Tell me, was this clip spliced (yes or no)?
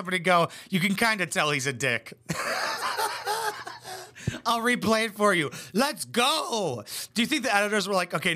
no